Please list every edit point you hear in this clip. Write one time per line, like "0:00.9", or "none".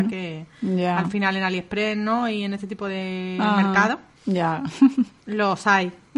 none